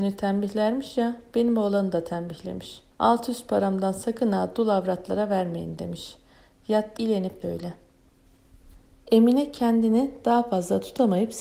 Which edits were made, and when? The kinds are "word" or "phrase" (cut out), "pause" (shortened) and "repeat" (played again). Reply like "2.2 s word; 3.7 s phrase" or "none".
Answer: 2.9 s pause; 7.0 s word; 7.4 s word